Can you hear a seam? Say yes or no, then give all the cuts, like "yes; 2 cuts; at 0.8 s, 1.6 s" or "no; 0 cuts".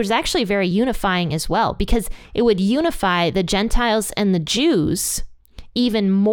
no; 0 cuts